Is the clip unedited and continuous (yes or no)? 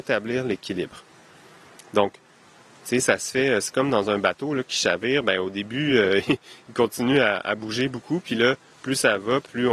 yes